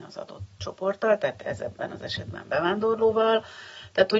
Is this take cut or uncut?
uncut